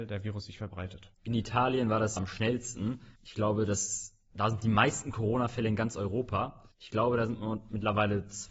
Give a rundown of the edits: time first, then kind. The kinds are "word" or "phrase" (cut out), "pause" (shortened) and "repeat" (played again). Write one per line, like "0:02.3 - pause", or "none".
0:01.1 - pause
0:02.2 - word
0:03.2 - pause
0:06.7 - pause